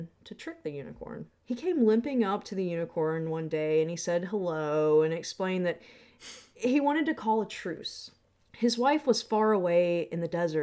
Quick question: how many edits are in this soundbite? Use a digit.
2